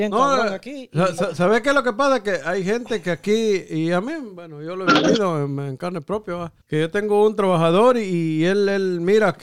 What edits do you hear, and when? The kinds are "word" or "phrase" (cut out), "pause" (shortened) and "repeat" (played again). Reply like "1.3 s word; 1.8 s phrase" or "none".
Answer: 6.6 s pause